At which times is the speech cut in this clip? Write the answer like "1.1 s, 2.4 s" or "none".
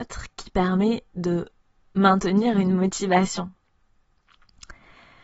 none